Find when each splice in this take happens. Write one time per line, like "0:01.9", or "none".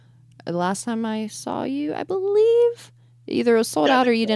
none